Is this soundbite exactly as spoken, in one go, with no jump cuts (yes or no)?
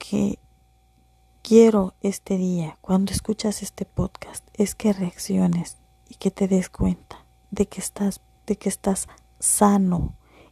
no